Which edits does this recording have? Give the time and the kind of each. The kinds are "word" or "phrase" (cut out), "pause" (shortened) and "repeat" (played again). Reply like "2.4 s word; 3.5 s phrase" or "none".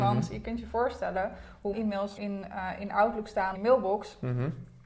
1.7 s word; 2.2 s word; 3.5 s phrase